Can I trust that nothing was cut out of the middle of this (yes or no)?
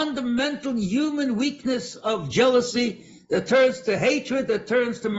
yes